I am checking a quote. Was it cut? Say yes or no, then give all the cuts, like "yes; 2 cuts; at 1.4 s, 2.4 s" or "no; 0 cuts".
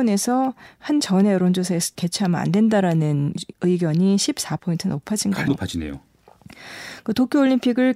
yes; 5 cuts; at 1.0 s, 1.9 s, 3.5 s, 4.6 s, 5.5 s